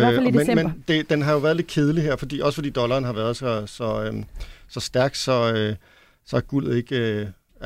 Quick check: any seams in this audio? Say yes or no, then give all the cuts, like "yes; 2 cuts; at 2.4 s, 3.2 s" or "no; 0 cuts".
no; 0 cuts